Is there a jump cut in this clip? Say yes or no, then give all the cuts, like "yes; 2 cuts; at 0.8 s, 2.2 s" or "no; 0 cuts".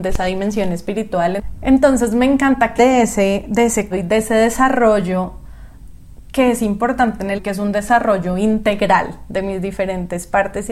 yes; 3 cuts; at 2.8 s, 3.9 s, 7.4 s